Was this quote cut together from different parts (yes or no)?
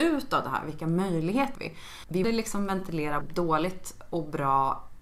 yes